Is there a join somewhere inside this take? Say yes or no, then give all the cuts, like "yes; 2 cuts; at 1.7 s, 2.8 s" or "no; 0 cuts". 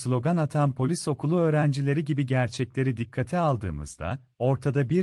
no; 0 cuts